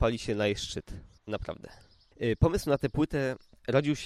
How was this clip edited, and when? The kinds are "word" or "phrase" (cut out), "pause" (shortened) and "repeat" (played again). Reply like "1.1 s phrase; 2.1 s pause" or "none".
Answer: 1.2 s pause

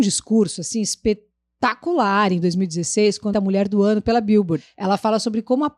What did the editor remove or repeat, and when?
3.3 s phrase

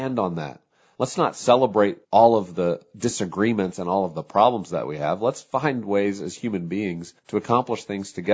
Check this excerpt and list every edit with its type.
2.0 s pause; 7.2 s pause

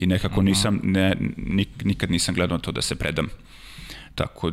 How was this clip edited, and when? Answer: none

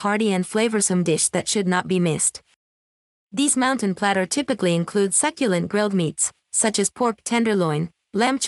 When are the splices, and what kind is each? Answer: none

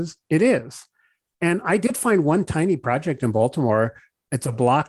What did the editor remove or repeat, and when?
none

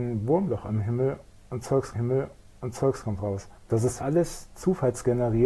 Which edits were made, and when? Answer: 1.9 s repeat; 3.5 s pause; 4.0 s word

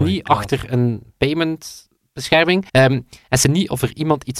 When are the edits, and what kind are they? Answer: 2.7 s pause; 3.4 s word

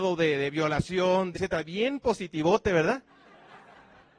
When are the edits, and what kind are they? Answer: 1.3 s phrase

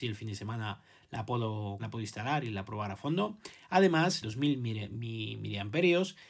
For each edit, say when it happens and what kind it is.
1.8 s word; 2.7 s word; 4.2 s phrase

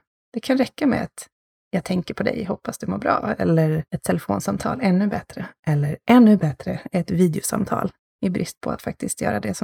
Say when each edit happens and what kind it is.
none

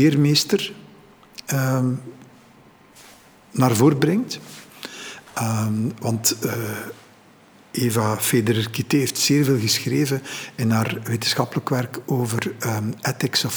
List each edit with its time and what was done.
none

